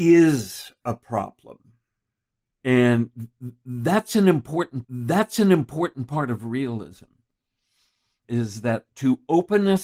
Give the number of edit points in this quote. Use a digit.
2